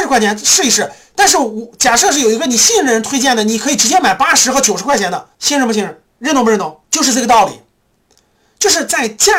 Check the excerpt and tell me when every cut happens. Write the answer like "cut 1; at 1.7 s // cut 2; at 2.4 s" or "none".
cut 1; at 5.3 s // cut 2; at 6.8 s